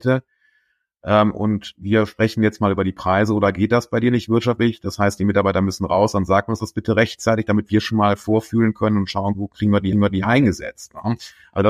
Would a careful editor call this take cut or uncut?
cut